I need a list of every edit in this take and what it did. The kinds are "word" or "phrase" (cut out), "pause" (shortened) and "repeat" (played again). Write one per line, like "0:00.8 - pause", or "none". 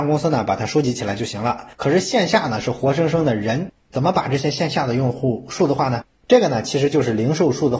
0:01.7 - pause

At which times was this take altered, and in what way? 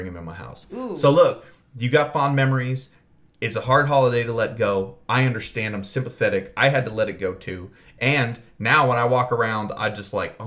none

